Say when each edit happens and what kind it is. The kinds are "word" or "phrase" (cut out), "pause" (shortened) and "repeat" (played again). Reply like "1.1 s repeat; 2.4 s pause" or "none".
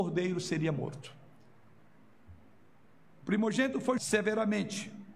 4.0 s word